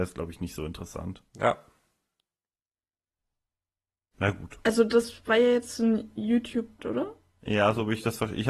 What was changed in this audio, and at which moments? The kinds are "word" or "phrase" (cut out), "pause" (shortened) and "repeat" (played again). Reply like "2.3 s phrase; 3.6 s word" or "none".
6.8 s word